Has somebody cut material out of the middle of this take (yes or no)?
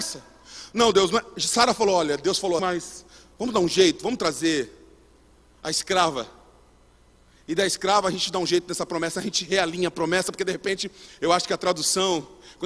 yes